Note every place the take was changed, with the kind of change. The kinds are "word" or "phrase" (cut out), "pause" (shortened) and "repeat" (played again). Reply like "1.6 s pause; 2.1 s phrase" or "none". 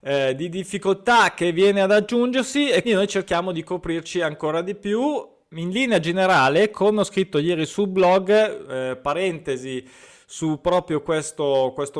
2.8 s word